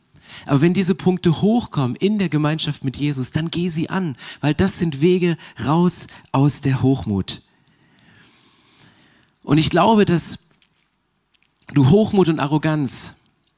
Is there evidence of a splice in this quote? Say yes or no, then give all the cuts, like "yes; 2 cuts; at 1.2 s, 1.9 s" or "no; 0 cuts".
no; 0 cuts